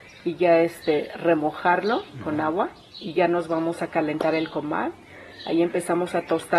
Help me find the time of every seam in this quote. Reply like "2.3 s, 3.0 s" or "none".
none